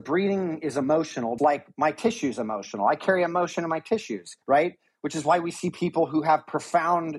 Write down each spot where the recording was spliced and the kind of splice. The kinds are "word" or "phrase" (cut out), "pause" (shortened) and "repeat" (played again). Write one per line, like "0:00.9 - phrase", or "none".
0:01.4 - word
0:04.4 - pause